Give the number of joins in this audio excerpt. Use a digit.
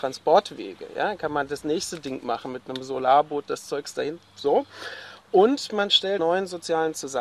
1